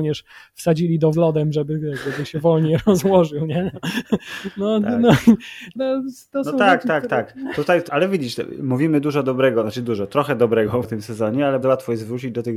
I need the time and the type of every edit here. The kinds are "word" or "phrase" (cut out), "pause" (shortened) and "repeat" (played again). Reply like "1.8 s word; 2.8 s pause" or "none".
1.1 s word; 5.8 s word; 7.9 s word; 10.8 s word; 11.6 s word